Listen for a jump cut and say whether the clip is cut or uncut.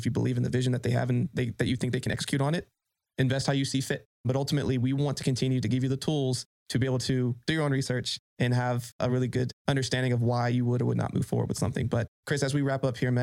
uncut